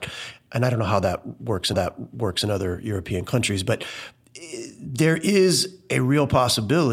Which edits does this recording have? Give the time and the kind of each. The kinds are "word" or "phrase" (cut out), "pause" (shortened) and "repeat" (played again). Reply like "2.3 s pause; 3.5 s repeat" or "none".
1.7 s repeat